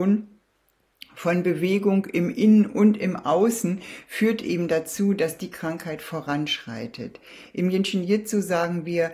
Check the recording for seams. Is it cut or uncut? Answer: uncut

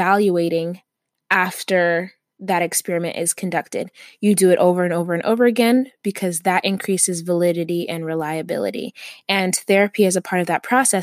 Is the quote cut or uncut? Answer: uncut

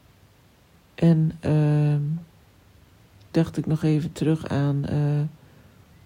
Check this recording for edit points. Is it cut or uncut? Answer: cut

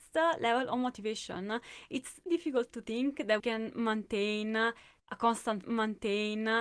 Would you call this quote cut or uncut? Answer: cut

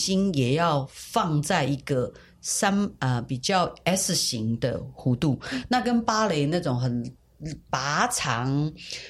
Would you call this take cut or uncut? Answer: uncut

